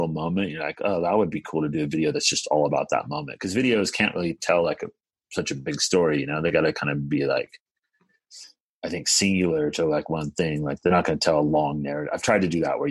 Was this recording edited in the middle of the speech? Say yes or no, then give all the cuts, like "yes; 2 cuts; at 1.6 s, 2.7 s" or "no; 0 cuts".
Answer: no; 0 cuts